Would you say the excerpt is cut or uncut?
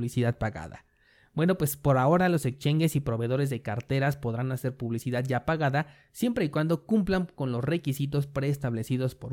uncut